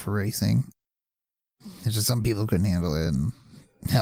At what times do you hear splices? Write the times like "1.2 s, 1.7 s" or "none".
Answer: none